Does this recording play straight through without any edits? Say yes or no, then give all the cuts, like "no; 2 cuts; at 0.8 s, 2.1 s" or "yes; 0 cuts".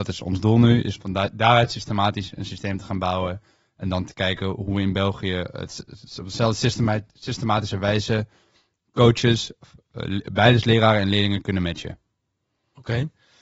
no; 1 cut; at 0.9 s